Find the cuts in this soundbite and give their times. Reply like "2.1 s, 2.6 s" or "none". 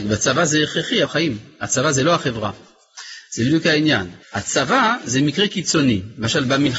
1.0 s, 4.2 s